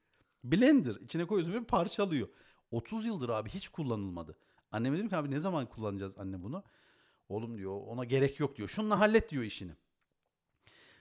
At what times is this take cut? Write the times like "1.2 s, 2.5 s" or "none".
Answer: none

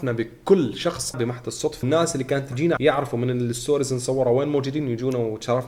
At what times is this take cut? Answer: 1.1 s, 1.8 s, 2.8 s

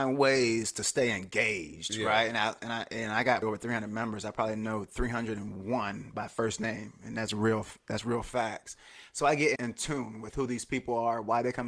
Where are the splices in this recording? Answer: 3.4 s, 9.5 s

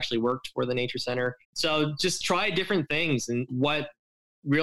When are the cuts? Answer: 1.4 s, 3.5 s

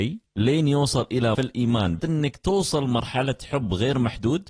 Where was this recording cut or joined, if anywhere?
1.3 s, 2.0 s

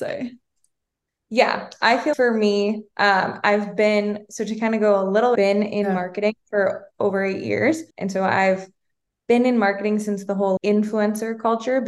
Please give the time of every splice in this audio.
2.1 s, 5.4 s, 7.9 s, 10.6 s

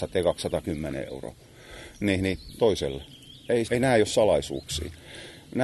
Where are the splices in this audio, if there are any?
2.6 s, 3.6 s

